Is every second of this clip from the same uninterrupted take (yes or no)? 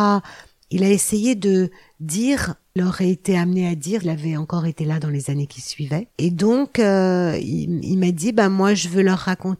no